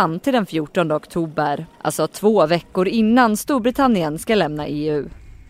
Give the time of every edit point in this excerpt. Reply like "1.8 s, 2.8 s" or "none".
1.7 s